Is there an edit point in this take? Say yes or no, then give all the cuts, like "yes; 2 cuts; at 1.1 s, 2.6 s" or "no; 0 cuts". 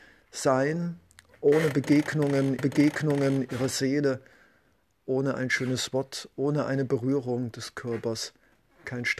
yes; 1 cut; at 2.6 s